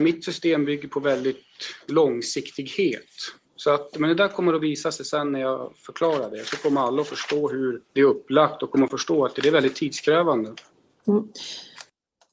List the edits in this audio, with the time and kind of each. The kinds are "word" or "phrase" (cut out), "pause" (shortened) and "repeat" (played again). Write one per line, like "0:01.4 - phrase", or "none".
0:03.4 - pause
0:07.9 - pause